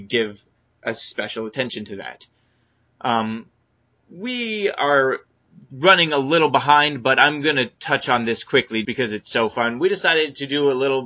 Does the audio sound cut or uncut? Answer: cut